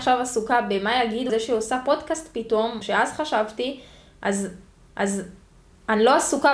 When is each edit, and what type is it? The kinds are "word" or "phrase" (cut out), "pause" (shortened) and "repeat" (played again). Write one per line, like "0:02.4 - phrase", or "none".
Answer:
0:01.3 - word
0:02.8 - word
0:04.9 - repeat